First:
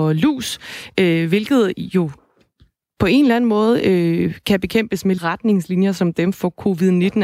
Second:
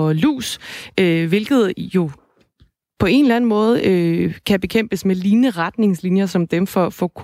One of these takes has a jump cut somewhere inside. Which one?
first; 2 cuts; at 5.2 s, 6.3 s

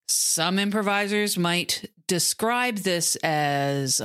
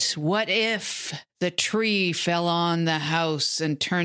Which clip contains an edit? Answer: second; 1 cut; at 1.3 s

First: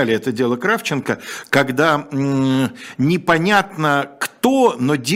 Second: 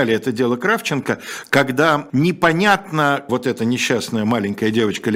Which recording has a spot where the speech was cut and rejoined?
second; 2 cuts; at 2.1 s, 3.3 s

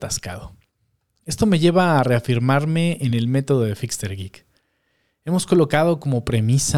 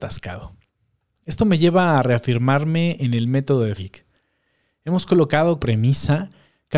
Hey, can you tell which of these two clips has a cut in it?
second; 2 cuts; at 3.8 s, 5.6 s

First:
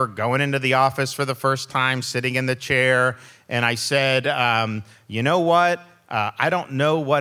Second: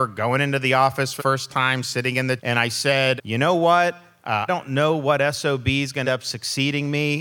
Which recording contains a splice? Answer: second; 5 cuts; at 1.2 s, 2.4 s, 3.2 s, 4.5 s, 6.0 s

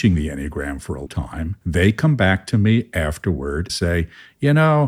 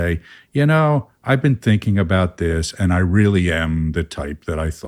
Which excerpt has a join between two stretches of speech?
first; 3 cuts; at 1.1 s, 1.6 s, 3.7 s

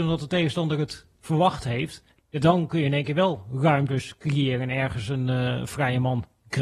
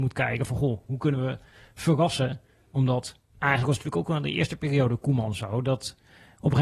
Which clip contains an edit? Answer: first; 1 cut; at 2.1 s

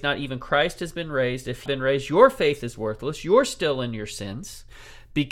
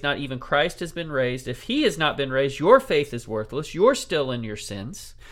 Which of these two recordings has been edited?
first; 1 cut; at 1.7 s

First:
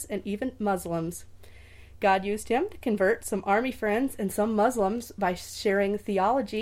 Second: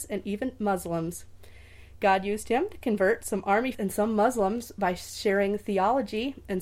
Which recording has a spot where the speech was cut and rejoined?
second; 1 cut; at 3.7 s

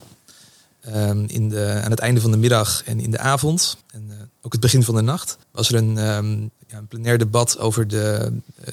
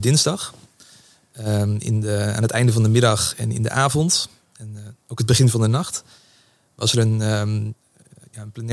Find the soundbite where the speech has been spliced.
first; 3 cuts; at 3.8 s, 5.4 s, 6.6 s

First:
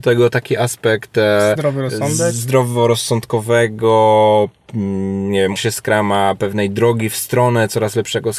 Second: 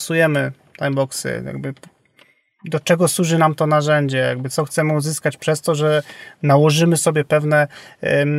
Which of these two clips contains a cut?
first; 1 cut; at 5.6 s

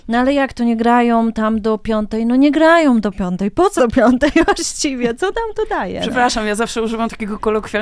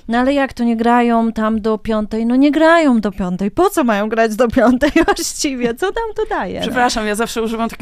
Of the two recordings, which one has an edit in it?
first; 1 cut; at 3.8 s

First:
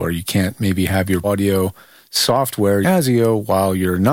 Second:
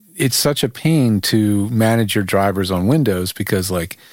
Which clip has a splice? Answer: first; 2 cuts; at 1.2 s, 2.8 s

